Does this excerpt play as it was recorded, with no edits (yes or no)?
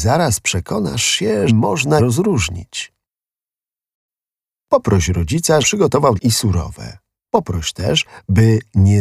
no